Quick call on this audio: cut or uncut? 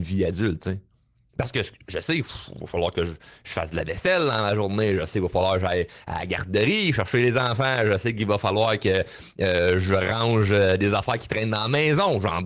uncut